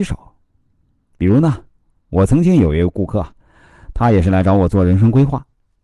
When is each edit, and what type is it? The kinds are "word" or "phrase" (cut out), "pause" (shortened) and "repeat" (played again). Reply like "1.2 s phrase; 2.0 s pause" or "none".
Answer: none